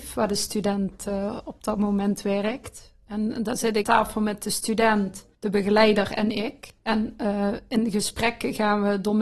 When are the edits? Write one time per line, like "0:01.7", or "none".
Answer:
0:03.8
0:05.3
0:06.8